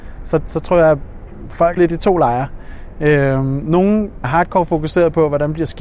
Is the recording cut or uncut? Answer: cut